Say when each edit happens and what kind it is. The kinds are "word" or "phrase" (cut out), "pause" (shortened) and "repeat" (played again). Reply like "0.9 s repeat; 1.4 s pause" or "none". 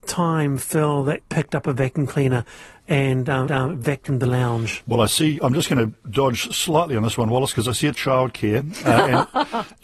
1.2 s word; 3.5 s repeat; 5.4 s word; 7.9 s word